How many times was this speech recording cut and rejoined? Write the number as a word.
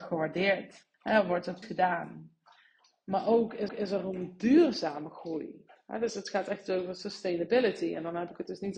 three